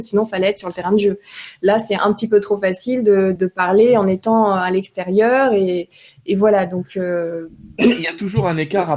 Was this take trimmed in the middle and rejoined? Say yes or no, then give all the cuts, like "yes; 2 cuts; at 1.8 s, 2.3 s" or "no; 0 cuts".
yes; 1 cut; at 3.4 s